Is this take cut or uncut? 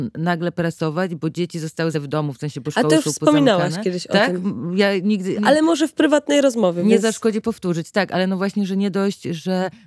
cut